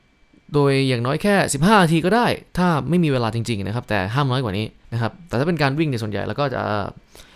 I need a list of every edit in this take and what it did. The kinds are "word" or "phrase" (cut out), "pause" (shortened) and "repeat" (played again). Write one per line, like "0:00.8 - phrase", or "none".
0:04.8 - pause